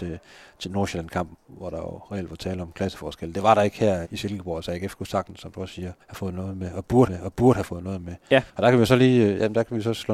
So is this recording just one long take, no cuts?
no; 5 cuts; at 1.3 s, 4.0 s, 6.0 s, 7.1 s, 8.5 s

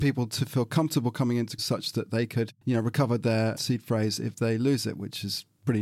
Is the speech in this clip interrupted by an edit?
yes; 1 cut; at 1.6 s

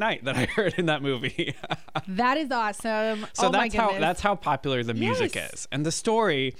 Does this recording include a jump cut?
no; 0 cuts

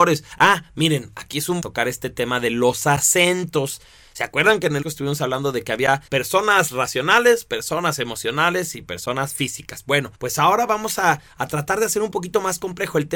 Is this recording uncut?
no; 4 cuts; at 1.6 s, 4.8 s, 6.1 s, 10.1 s

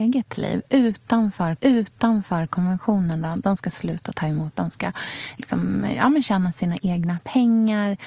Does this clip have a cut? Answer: yes; 3 cuts; at 1.6 s, 4.5 s, 5.4 s

